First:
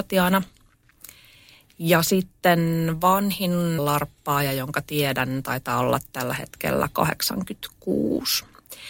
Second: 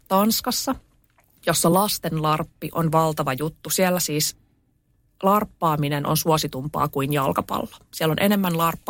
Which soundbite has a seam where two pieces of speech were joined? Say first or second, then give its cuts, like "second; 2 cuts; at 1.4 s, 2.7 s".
first; 1 cut; at 3.8 s